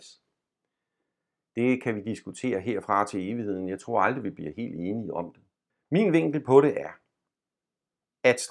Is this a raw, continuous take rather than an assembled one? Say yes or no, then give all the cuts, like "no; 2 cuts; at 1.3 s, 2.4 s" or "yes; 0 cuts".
no; 1 cut; at 5.7 s